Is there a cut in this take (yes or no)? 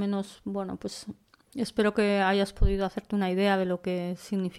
no